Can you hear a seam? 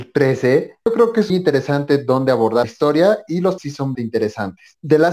yes; 4 cuts; at 1.3 s, 2.6 s, 3.6 s, 3.9 s

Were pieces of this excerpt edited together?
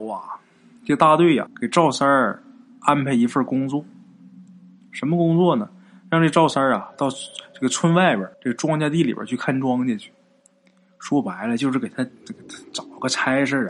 yes; 2 cuts; at 1.5 s, 8.3 s

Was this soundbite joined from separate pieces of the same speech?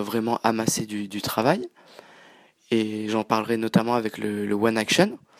no; 0 cuts

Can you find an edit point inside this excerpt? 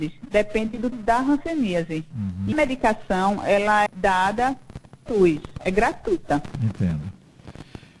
yes; 4 cuts; at 0.9 s, 2.5 s, 3.9 s, 5.1 s

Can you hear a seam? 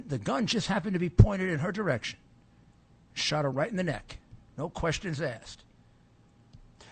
no; 0 cuts

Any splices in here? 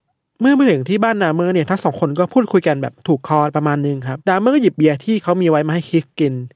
yes; 1 cut; at 4.2 s

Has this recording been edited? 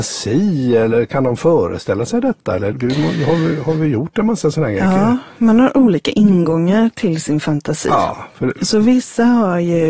yes; 1 cut; at 2.7 s

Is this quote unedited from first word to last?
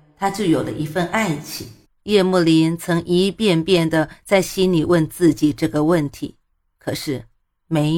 no; 1 cut; at 1.8 s

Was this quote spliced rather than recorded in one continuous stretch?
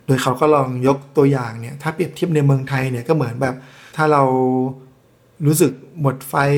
no; 0 cuts

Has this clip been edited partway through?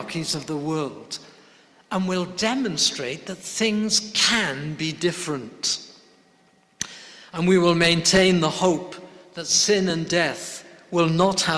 no; 0 cuts

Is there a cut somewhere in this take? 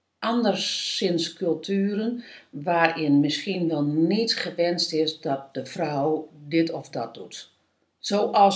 no; 0 cuts

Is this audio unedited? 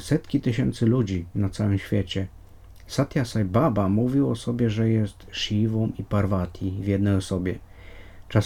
yes; 0 cuts

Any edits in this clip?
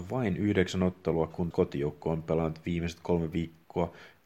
yes; 1 cut; at 1.5 s

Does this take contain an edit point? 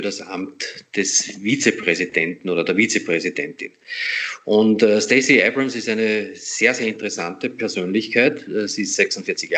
no; 0 cuts

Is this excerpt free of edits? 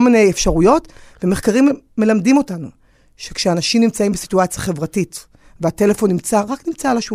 yes; 0 cuts

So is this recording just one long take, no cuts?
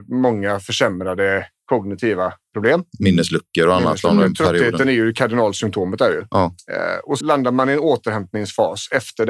no; 1 cut; at 7.2 s

